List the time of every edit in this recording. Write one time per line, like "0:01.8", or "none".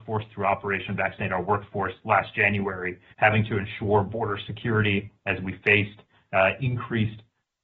none

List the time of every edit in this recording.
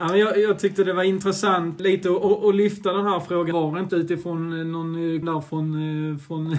0:01.8
0:03.5
0:03.9
0:05.2

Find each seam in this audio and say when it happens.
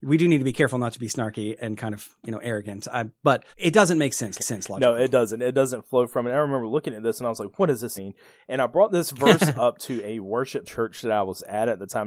0:01.6
0:03.5
0:04.4
0:08.0
0:10.6

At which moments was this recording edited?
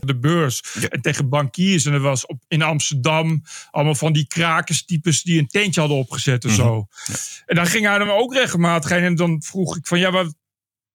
none

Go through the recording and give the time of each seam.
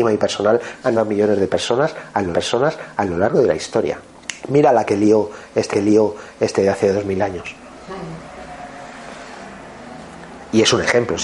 0:00.9
0:02.3
0:04.4
0:05.7

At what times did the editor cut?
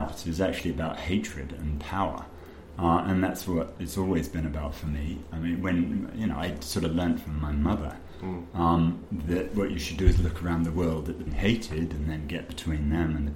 0:11.3

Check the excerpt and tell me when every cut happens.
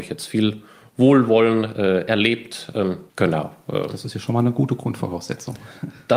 0:03.1

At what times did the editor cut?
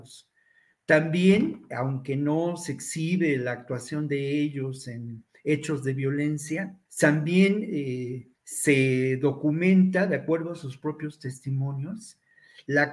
0:06.9
0:08.4

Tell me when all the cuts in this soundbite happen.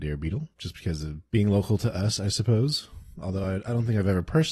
none

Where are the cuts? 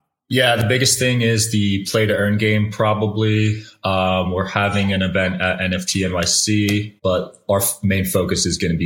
0:07.0

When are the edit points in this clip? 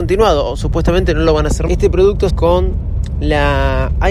0:01.7
0:02.3

